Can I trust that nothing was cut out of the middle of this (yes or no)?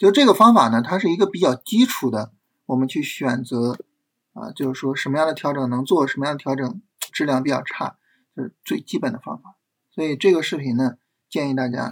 no